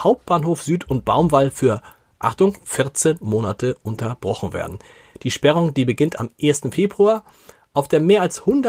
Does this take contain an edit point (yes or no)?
no